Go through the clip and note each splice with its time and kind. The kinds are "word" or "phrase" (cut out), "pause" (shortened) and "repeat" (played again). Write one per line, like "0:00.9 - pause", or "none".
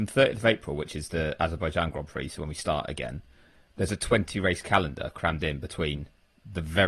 none